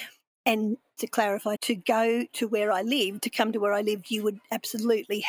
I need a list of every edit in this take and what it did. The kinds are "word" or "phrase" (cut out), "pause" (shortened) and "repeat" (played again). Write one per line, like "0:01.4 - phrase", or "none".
0:01.0 - word
0:01.6 - word